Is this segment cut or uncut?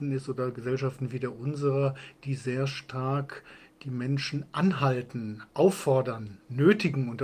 uncut